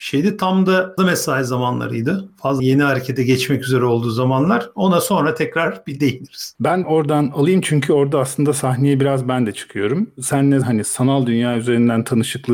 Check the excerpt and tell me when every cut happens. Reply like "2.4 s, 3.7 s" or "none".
1.0 s, 2.6 s, 6.8 s, 10.6 s